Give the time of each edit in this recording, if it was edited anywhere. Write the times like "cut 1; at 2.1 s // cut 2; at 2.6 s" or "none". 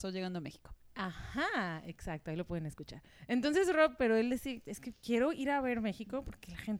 cut 1; at 4.0 s